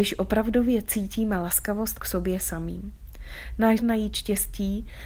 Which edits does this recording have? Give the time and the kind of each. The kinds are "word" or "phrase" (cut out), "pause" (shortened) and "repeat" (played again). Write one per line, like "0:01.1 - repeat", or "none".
0:02.0 - phrase
0:03.8 - word